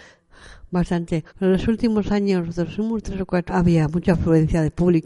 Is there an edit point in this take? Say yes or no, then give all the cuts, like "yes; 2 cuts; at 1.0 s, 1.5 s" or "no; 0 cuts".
yes; 2 cuts; at 1.3 s, 3.5 s